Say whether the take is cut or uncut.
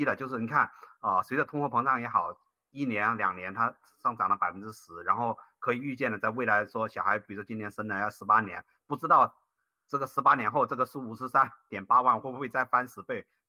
uncut